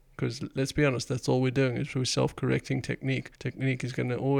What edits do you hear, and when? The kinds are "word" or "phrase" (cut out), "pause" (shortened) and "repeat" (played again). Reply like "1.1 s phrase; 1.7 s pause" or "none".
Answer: 3.3 s pause

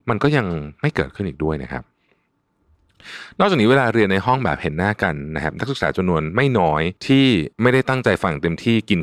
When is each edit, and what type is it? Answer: 7.0 s pause; 7.5 s pause

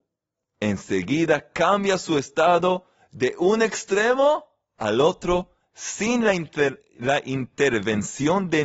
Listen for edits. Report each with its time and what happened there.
none

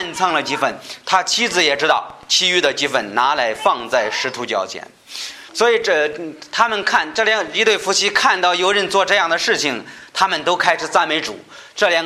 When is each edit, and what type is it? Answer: 5.5 s phrase

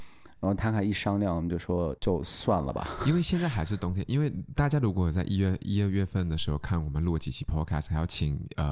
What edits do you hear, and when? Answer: 2.0 s pause

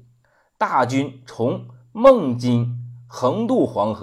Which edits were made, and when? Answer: none

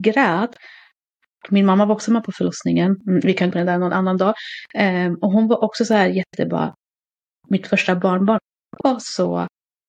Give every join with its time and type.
3.0 s pause; 3.5 s phrase; 8.8 s word

